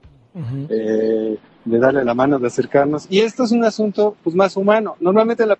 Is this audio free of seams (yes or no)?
yes